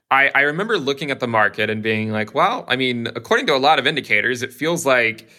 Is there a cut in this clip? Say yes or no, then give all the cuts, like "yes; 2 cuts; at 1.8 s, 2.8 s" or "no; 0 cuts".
no; 0 cuts